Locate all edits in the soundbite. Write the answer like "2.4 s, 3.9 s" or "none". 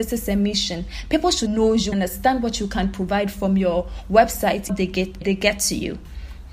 1.5 s, 1.9 s, 4.7 s, 5.2 s